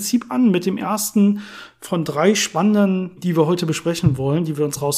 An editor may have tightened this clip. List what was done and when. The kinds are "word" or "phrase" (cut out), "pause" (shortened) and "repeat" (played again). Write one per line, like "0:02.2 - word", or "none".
0:03.2 - word